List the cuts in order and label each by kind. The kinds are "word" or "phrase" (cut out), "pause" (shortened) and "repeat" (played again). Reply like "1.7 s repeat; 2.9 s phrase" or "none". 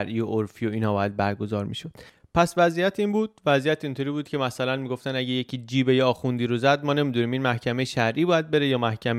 none